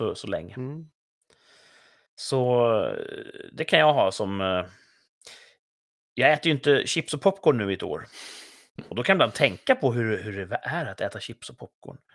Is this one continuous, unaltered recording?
yes; 0 cuts

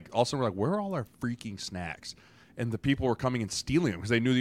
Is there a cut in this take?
no; 0 cuts

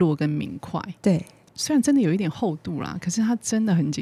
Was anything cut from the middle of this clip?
no; 0 cuts

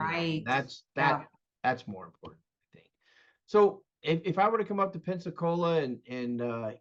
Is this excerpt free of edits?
yes; 0 cuts

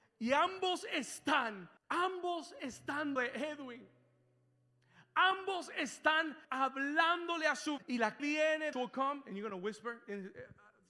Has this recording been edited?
yes; 6 cuts; at 1.8 s, 3.2 s, 6.4 s, 7.8 s, 8.2 s, 8.7 s

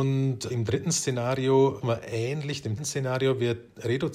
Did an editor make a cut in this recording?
yes; 2 cuts; at 1.8 s, 2.8 s

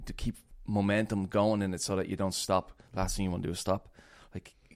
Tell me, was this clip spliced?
no; 0 cuts

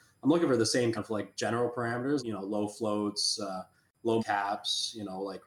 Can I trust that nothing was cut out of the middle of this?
no; 3 cuts; at 1.0 s, 2.2 s, 4.2 s

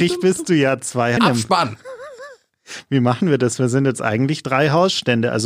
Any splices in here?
yes; 1 cut; at 1.2 s

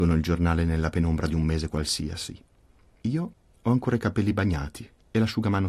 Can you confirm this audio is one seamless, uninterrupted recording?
yes; 0 cuts

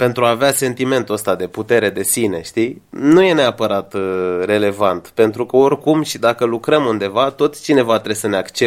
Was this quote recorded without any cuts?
yes; 0 cuts

